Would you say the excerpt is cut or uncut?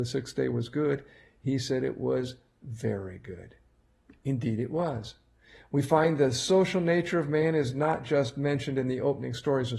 uncut